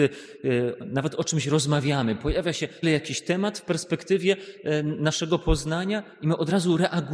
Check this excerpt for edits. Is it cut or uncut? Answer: cut